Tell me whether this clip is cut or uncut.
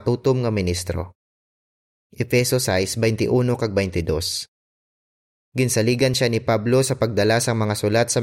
uncut